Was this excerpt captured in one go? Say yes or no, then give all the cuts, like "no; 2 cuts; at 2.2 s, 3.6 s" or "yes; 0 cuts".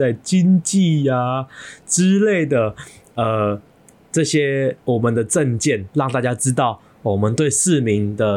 yes; 0 cuts